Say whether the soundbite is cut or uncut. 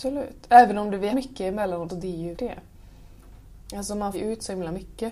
cut